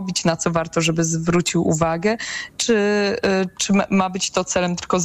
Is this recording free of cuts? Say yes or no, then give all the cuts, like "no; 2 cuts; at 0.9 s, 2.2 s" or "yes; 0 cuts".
yes; 0 cuts